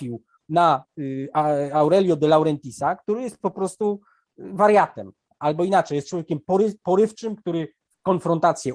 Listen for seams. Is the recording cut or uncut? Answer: uncut